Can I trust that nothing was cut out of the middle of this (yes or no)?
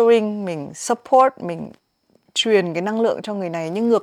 yes